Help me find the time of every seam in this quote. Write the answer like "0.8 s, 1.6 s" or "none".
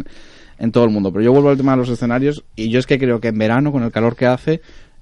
none